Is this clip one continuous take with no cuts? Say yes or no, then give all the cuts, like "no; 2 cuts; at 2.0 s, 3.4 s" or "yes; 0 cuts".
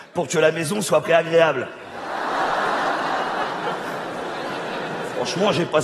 no; 1 cut; at 1.0 s